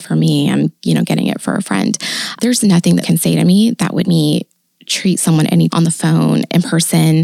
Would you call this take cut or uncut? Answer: cut